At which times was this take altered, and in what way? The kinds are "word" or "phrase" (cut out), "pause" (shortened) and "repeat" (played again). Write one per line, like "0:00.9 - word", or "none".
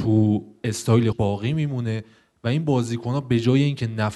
0:01.1 - word